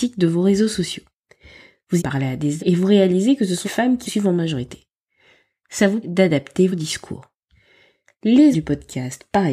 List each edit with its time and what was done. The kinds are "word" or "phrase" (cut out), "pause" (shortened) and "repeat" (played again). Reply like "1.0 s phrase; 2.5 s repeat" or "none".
2.0 s word; 2.6 s word; 3.6 s word; 4.1 s word; 6.0 s word; 6.7 s word; 8.5 s word